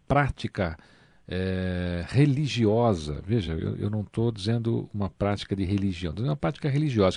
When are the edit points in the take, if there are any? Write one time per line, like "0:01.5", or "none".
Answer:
none